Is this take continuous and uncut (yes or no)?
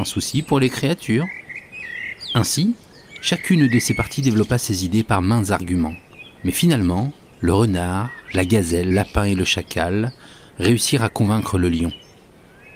no